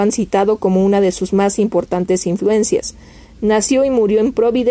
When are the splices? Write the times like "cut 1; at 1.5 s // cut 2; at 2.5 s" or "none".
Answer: none